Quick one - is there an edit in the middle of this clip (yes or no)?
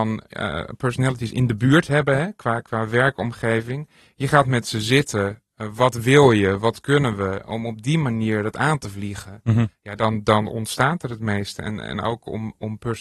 no